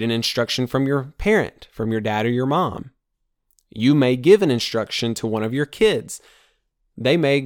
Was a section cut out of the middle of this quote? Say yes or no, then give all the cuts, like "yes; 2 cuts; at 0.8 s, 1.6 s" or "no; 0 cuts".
no; 0 cuts